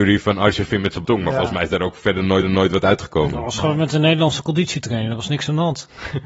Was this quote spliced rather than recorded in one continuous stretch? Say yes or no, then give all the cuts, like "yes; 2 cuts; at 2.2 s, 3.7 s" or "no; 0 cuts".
yes; 2 cuts; at 1.0 s, 2.4 s